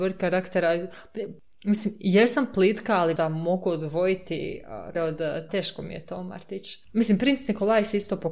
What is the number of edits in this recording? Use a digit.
3